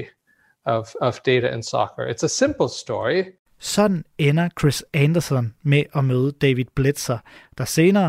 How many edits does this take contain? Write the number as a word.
zero